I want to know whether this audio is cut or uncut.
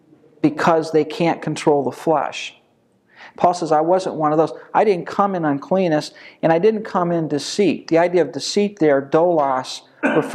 uncut